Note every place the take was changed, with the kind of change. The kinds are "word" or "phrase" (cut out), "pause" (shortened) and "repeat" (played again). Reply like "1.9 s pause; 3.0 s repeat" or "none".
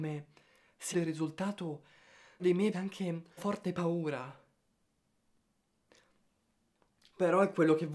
0.9 s word; 2.4 s word; 2.7 s word; 3.4 s word